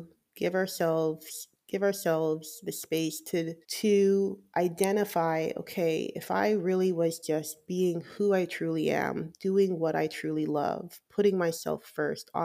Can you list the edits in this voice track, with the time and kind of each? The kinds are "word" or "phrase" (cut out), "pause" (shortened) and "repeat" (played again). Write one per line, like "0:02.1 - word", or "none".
0:03.6 - pause